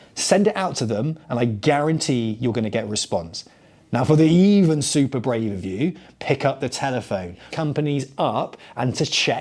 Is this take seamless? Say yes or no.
no